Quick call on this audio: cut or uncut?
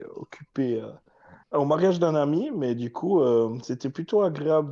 cut